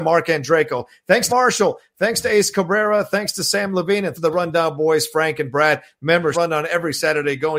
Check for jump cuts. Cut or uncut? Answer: cut